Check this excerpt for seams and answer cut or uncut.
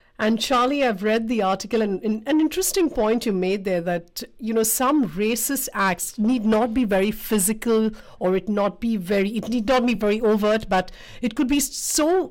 uncut